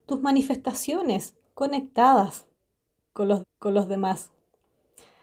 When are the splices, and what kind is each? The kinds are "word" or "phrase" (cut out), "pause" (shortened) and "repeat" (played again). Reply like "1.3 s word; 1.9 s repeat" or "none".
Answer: 1.4 s word; 3.4 s repeat